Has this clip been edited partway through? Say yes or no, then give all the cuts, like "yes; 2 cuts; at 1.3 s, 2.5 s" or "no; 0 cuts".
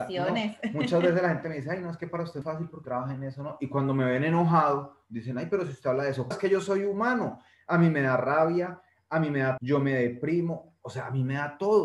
yes; 4 cuts; at 2.4 s, 2.8 s, 6.3 s, 9.6 s